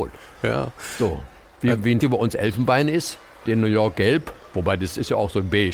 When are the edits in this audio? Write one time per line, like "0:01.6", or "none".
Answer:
0:02.0
0:03.5